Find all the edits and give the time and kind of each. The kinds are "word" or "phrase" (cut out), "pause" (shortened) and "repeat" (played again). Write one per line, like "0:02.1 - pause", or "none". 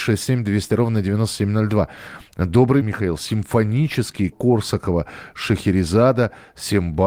0:02.8 - word
0:04.3 - phrase